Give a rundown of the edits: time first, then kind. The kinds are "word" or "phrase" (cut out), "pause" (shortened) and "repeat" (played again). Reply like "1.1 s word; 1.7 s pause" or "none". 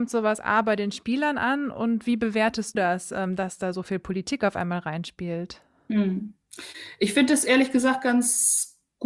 2.7 s word